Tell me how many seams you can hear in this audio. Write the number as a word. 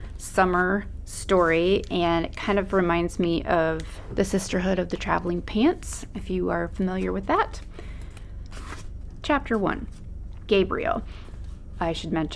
zero